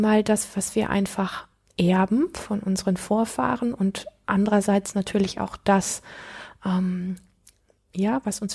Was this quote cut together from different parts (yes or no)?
no